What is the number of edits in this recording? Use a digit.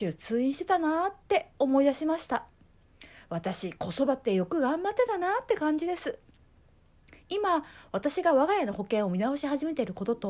0